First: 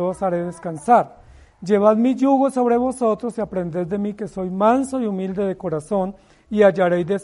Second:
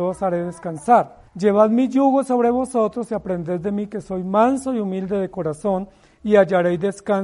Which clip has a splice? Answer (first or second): second